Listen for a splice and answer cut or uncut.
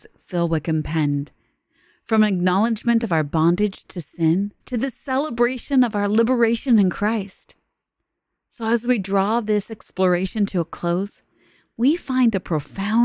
cut